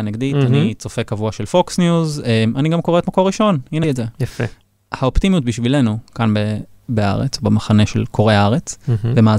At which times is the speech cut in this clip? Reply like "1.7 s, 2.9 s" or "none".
3.8 s